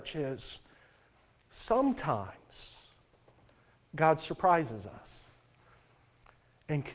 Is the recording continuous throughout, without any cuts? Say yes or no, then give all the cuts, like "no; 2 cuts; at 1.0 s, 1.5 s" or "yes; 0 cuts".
yes; 0 cuts